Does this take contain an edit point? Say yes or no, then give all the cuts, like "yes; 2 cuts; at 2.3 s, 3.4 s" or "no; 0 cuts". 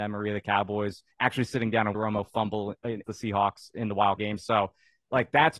yes; 4 cuts; at 1.1 s, 1.9 s, 3.0 s, 4.2 s